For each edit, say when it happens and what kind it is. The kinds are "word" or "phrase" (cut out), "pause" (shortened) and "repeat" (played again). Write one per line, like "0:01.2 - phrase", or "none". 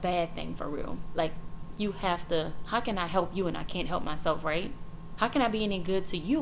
none